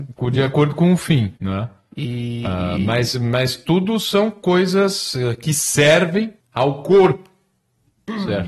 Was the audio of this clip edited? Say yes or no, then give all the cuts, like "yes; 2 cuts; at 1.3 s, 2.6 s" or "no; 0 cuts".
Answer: yes; 2 cuts; at 1.4 s, 6.4 s